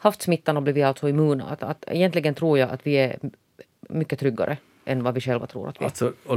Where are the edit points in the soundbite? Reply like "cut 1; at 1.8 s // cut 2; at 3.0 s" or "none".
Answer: none